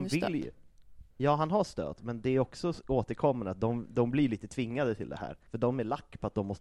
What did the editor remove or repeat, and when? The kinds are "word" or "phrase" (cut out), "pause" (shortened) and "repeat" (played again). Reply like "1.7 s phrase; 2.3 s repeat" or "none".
1.1 s pause; 5.5 s pause